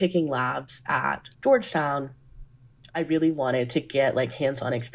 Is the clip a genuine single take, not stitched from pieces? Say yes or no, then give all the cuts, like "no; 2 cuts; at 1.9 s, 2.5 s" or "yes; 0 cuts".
no; 1 cut; at 1.3 s